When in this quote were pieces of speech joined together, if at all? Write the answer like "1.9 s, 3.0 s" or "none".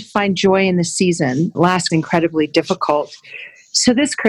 1.9 s